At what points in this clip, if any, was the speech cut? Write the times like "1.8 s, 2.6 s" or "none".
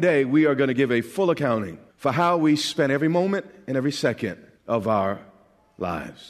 1.9 s, 4.6 s